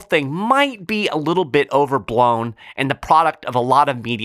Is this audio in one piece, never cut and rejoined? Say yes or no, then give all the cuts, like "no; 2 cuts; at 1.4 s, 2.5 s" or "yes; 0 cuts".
yes; 0 cuts